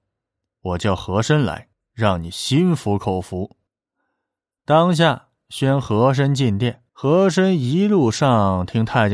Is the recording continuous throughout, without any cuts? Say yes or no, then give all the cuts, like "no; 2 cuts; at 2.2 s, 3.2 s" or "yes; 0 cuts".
no; 3 cuts; at 1.7 s, 3.7 s, 6.9 s